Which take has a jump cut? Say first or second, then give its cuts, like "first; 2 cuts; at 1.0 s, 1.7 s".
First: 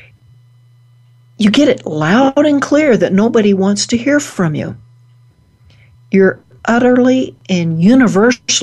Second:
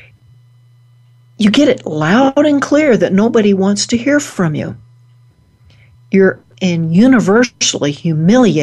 second; 1 cut; at 6.5 s